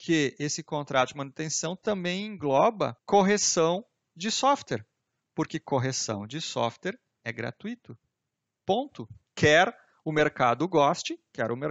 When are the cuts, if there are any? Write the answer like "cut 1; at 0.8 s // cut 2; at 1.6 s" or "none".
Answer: none